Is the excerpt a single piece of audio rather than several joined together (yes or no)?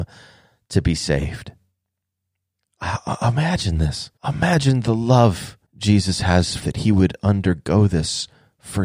no